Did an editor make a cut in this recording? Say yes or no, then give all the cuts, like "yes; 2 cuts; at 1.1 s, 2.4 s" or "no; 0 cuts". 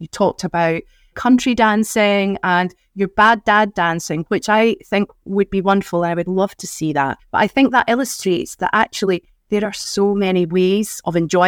no; 0 cuts